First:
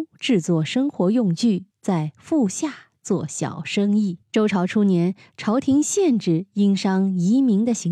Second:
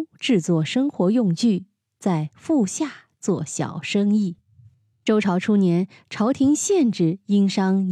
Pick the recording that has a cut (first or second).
first